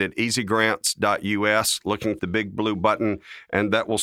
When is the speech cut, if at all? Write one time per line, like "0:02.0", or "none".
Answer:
0:02.2